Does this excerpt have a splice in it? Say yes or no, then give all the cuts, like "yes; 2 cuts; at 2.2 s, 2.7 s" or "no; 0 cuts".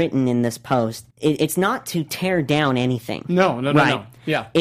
yes; 1 cut; at 1.1 s